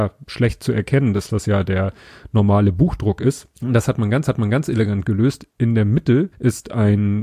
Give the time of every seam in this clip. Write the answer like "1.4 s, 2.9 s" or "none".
1.3 s, 3.6 s, 4.3 s, 6.3 s